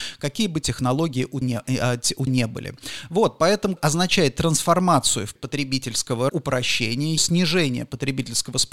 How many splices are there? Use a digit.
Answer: 6